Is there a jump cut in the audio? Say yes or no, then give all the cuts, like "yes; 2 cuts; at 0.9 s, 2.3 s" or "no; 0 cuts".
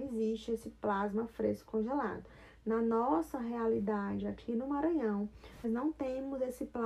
yes; 1 cut; at 5.6 s